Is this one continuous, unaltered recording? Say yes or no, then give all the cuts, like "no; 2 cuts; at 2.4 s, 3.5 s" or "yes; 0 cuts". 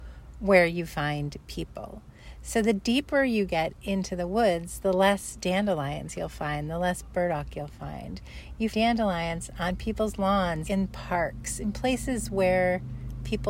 no; 2 cuts; at 8.7 s, 10.7 s